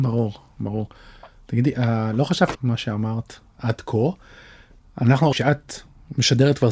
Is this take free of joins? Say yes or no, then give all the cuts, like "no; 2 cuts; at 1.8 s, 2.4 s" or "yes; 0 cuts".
no; 2 cuts; at 2.5 s, 5.3 s